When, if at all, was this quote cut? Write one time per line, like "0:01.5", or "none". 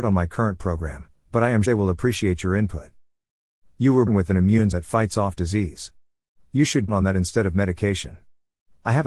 0:01.6
0:04.1
0:04.7
0:06.9